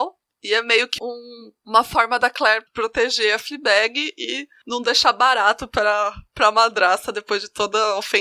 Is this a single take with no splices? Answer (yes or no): no